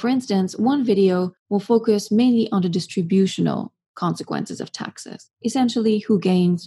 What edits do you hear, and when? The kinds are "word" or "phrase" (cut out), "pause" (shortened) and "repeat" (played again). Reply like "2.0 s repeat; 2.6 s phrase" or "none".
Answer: 1.4 s pause; 5.3 s pause